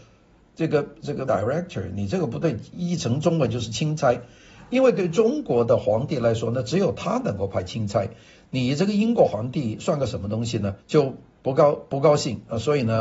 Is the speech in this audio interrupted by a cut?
yes; 2 cuts; at 1.3 s, 10.8 s

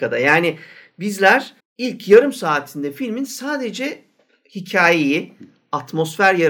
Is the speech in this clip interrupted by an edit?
yes; 1 cut; at 1.6 s

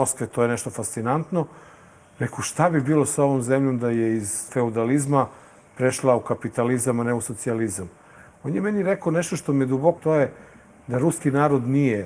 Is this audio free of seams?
no; 2 cuts; at 4.5 s, 10.0 s

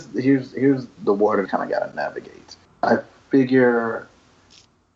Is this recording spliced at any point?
yes; 2 cuts; at 1.0 s, 1.5 s

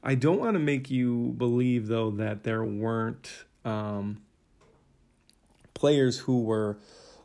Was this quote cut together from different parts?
no; 0 cuts

